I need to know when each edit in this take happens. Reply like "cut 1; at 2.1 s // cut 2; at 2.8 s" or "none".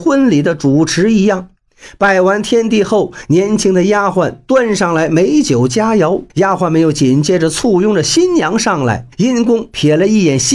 cut 1; at 6.3 s // cut 2; at 9.1 s